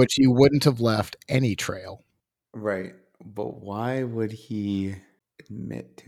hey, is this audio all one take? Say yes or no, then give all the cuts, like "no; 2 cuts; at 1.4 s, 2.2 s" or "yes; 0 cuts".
yes; 0 cuts